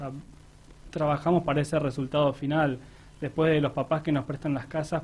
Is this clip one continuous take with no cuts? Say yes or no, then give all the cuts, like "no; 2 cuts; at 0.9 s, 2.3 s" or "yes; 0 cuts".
yes; 0 cuts